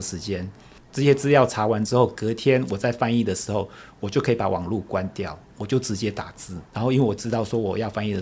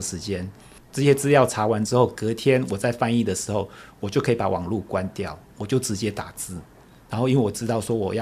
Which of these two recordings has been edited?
first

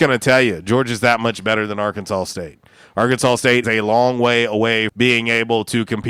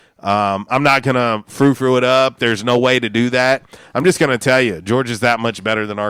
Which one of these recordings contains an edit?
first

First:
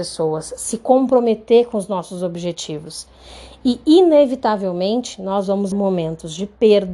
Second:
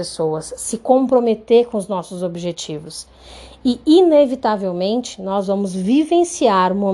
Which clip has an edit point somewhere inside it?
first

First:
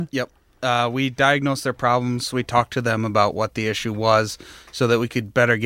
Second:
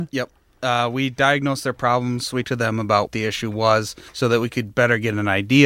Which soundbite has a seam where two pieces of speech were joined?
second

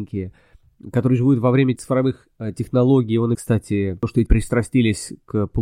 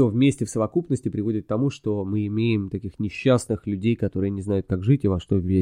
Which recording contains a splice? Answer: first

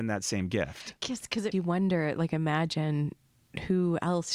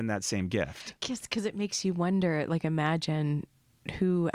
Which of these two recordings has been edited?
first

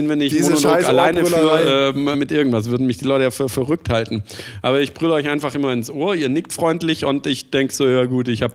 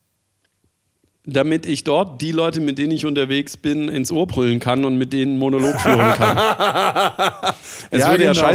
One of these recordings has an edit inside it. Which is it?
first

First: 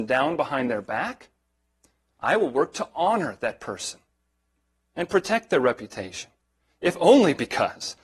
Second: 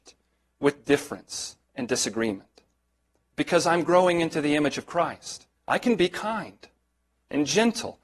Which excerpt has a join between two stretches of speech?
second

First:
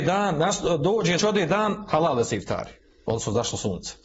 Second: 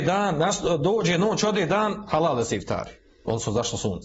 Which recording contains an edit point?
first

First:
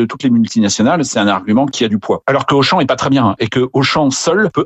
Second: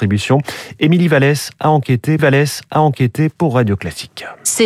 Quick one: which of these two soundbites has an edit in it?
second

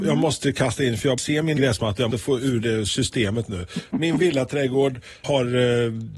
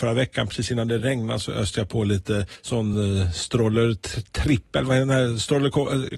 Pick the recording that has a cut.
first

